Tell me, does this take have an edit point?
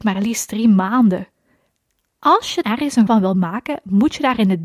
yes; 2 cuts; at 2.6 s, 3.1 s

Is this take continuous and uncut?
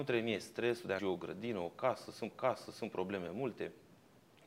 no; 2 cuts; at 1.0 s, 2.3 s

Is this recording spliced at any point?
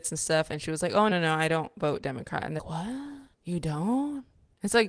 yes; 3 cuts; at 1.1 s, 2.6 s, 3.3 s

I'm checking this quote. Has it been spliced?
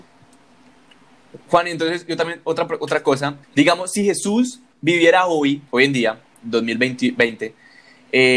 yes; 2 cuts; at 3.4 s, 5.7 s

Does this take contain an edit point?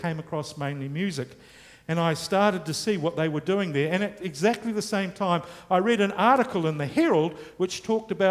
no; 0 cuts

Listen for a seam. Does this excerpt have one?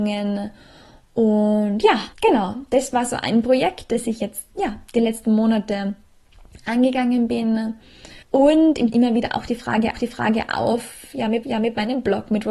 yes; 6 cuts; at 2.1 s, 4.5 s, 8.2 s, 8.9 s, 9.9 s, 11.4 s

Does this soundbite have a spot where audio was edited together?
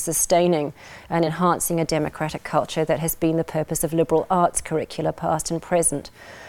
no; 0 cuts

